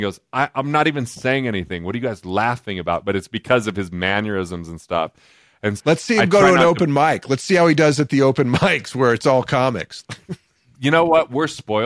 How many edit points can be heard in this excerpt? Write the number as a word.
one